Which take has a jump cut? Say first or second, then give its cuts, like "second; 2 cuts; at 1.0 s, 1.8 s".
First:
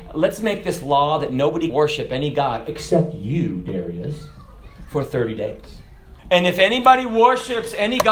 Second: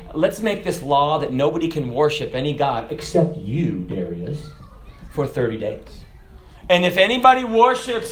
first; 2 cuts; at 1.7 s, 6.2 s